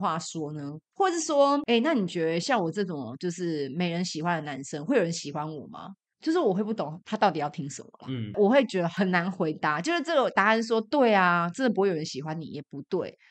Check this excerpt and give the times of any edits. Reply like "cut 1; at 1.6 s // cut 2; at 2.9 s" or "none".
none